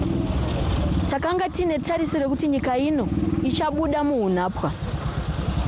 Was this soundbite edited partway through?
no; 0 cuts

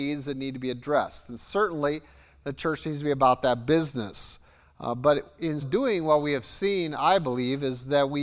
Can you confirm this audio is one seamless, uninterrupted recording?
no; 1 cut; at 5.6 s

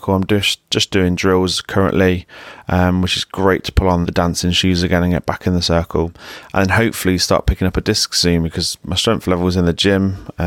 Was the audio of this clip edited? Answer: yes; 1 cut; at 4.0 s

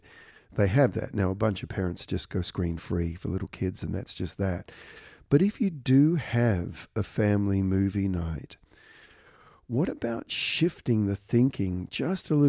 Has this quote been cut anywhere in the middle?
no; 0 cuts

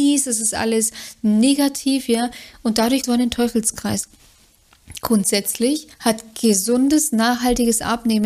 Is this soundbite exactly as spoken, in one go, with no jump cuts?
no; 2 cuts; at 3.0 s, 5.9 s

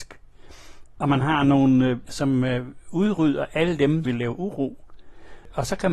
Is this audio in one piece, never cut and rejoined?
no; 2 cuts; at 2.1 s, 4.1 s

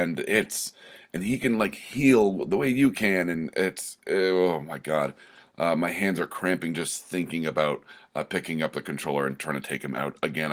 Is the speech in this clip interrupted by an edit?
no; 0 cuts

